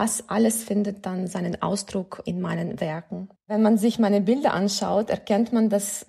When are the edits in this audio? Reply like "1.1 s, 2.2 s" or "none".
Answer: 3.4 s